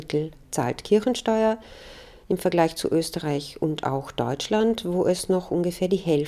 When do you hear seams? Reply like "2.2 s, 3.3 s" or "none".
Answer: none